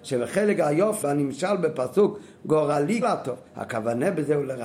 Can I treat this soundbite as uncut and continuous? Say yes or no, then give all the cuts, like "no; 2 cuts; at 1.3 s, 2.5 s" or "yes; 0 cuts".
no; 3 cuts; at 1.0 s, 3.0 s, 3.5 s